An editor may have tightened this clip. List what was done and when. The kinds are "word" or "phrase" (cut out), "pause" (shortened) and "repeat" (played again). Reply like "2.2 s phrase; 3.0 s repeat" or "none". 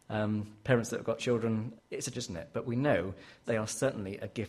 1.2 s word; 1.8 s word; 2.1 s word; 3.4 s word